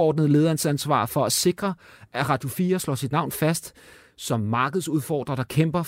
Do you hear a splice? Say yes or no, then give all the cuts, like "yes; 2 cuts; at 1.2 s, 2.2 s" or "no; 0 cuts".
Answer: no; 0 cuts